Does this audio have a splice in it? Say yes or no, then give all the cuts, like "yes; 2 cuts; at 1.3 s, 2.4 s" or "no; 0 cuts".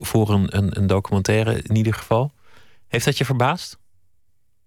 no; 0 cuts